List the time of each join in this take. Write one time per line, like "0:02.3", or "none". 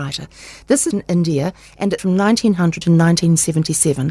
0:00.9
0:02.0
0:02.8